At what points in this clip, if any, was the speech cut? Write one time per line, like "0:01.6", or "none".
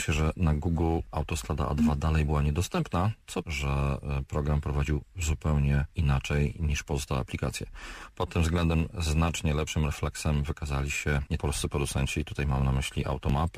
0:03.4
0:05.9
0:11.4